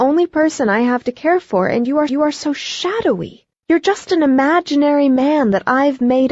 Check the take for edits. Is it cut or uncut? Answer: cut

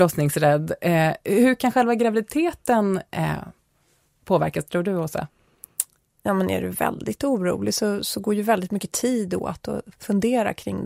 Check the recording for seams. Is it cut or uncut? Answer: uncut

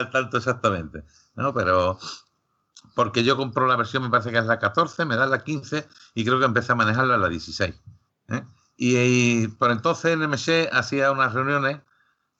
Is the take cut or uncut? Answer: cut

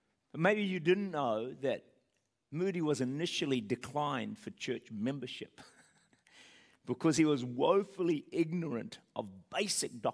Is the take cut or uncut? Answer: uncut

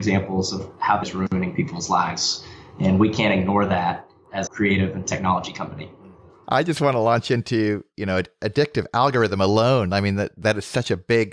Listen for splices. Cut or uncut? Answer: cut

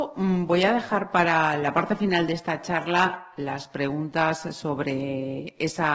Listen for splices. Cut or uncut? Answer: uncut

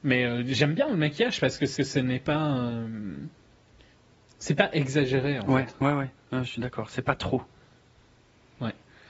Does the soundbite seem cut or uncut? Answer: cut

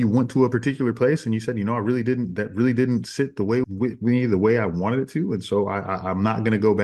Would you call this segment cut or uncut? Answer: cut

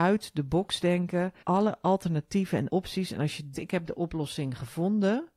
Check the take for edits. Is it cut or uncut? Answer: cut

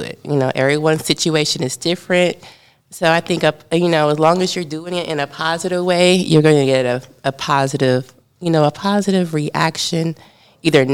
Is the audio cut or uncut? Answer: uncut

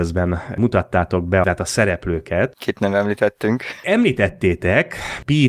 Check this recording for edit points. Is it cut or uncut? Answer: cut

